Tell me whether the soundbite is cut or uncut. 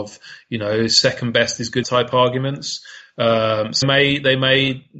cut